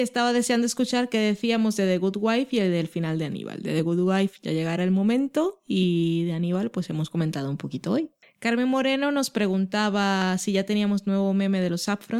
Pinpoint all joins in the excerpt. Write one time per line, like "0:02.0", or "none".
none

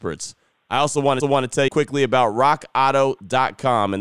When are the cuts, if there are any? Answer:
0:01.2
0:01.7

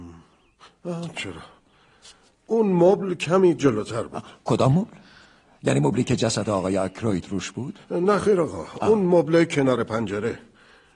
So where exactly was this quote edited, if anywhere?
0:01.1

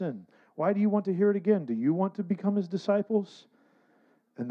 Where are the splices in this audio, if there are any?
none

